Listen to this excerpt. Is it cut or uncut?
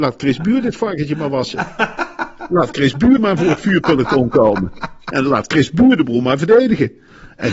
cut